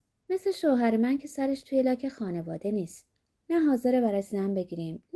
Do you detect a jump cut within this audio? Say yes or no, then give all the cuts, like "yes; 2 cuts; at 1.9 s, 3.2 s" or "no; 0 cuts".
no; 0 cuts